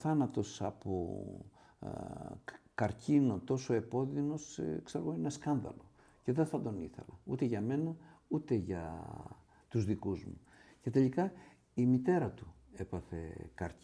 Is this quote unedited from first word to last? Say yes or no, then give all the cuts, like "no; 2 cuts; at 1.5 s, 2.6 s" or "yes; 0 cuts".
yes; 0 cuts